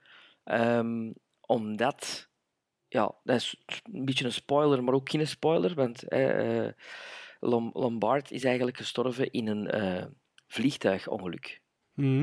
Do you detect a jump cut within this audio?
no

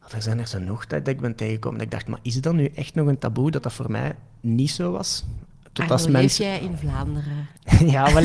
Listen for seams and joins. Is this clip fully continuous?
yes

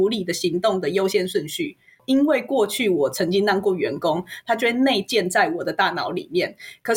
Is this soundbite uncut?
yes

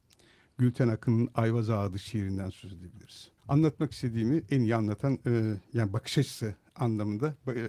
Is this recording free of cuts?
no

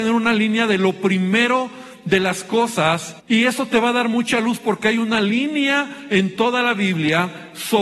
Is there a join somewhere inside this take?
yes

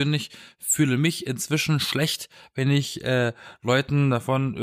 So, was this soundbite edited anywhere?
no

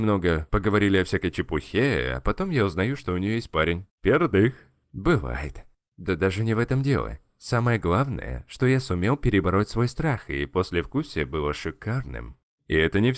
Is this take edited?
no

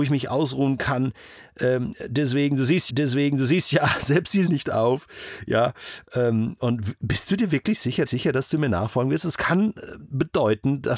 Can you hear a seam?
yes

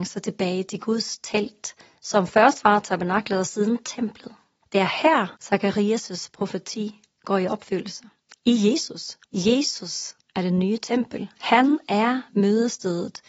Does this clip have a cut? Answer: yes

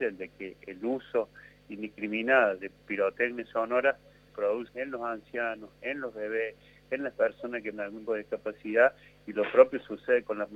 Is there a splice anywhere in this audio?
yes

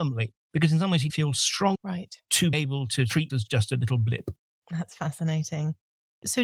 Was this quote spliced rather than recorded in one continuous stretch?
yes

